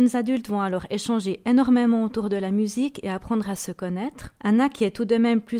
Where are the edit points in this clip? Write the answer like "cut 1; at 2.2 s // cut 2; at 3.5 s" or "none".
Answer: cut 1; at 4.4 s